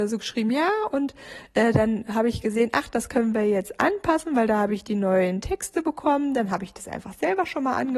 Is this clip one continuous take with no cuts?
yes; 0 cuts

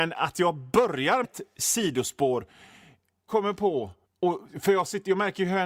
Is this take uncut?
no; 3 cuts; at 1.2 s, 3.3 s, 4.0 s

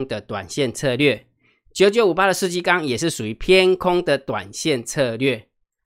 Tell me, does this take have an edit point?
no; 0 cuts

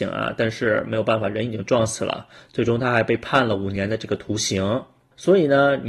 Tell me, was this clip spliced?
no; 0 cuts

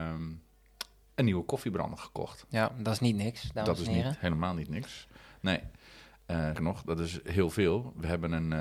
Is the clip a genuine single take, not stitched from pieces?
no; 1 cut; at 6.5 s

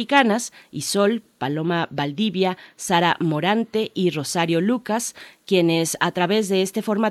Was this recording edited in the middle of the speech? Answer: no; 0 cuts

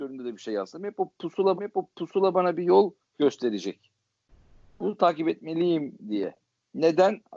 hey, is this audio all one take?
no; 1 cut; at 1.6 s

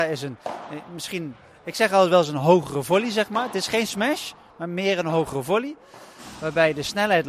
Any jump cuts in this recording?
no; 0 cuts

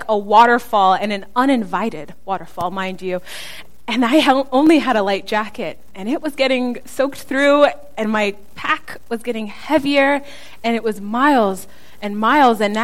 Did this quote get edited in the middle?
no; 0 cuts

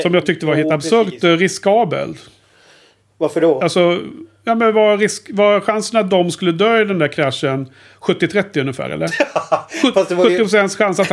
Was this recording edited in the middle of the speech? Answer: no; 0 cuts

